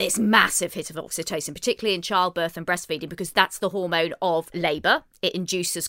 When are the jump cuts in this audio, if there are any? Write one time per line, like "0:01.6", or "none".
none

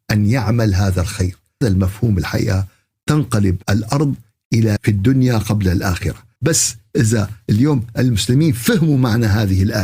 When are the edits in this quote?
0:01.6
0:03.6
0:04.8
0:06.4

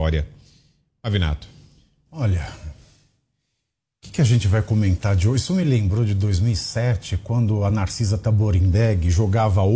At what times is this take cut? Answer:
none

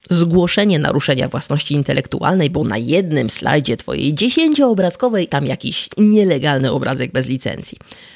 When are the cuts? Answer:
0:05.3

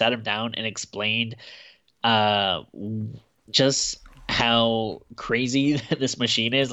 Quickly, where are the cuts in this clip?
0:03.5

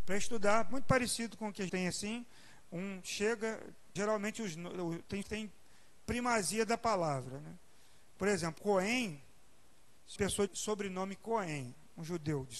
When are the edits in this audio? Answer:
0:01.7
0:04.0
0:05.2
0:08.6
0:10.2
0:10.5

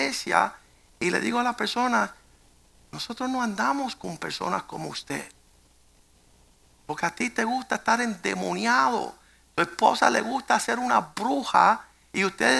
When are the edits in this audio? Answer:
none

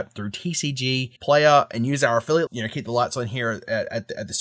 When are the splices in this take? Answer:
0:01.2
0:02.5

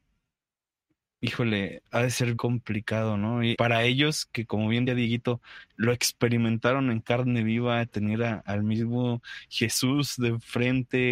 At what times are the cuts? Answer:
0:02.4
0:03.5
0:04.9

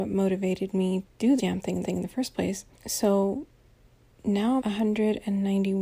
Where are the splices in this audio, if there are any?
0:01.0
0:01.4
0:01.8
0:02.8
0:04.6

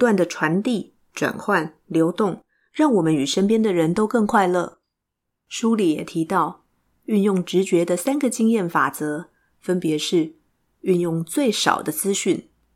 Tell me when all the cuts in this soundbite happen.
none

